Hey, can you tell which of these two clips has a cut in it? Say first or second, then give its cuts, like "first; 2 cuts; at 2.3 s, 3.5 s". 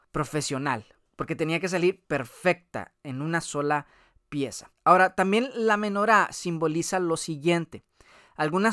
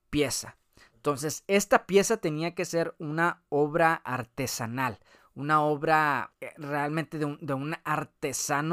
first; 1 cut; at 4.7 s